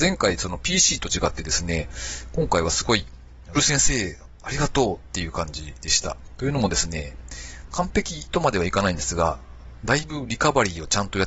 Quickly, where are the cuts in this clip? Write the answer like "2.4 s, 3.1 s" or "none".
3.5 s